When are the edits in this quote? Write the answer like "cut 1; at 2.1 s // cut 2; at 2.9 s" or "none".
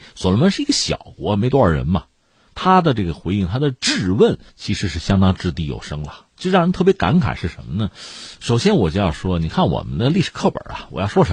cut 1; at 4.5 s // cut 2; at 6.3 s